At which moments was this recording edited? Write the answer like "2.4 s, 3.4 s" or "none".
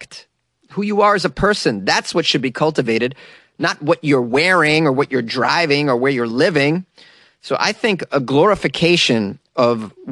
none